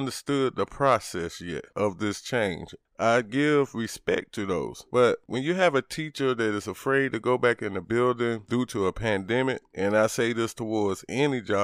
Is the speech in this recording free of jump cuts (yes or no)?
yes